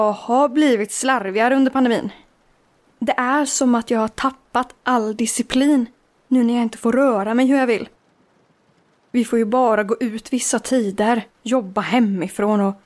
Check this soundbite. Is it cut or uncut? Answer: cut